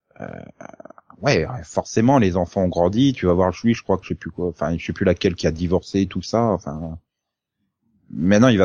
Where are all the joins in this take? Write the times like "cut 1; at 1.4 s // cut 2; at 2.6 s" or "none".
cut 1; at 4.0 s